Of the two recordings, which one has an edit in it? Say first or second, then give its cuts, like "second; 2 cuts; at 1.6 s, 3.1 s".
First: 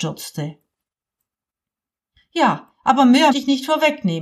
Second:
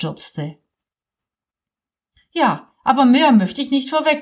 first; 1 cut; at 3.3 s